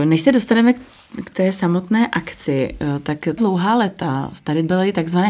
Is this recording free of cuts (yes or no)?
no